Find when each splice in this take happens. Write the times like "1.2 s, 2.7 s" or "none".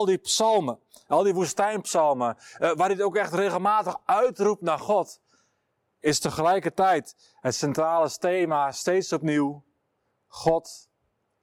none